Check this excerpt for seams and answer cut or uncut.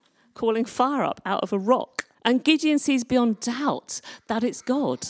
cut